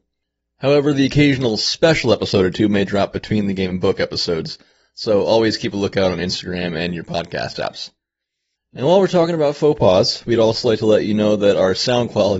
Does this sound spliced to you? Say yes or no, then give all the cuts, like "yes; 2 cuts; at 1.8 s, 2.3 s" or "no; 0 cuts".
no; 0 cuts